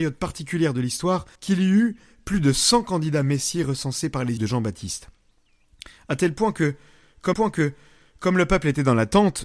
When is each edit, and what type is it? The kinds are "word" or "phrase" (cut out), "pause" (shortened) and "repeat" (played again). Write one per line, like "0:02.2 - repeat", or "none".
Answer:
0:01.3 - pause
0:04.4 - phrase
0:07.3 - repeat